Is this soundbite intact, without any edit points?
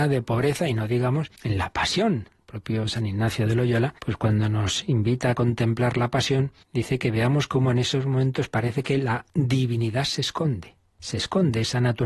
no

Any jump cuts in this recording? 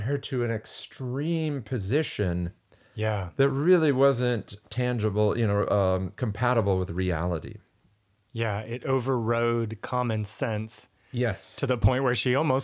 no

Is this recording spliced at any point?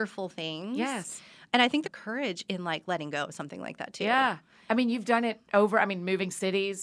yes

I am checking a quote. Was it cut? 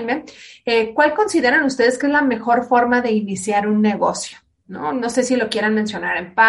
no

